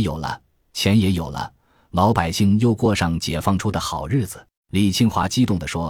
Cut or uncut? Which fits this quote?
cut